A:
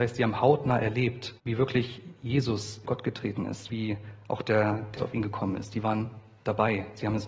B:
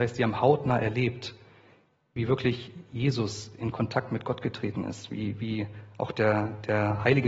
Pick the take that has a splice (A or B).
A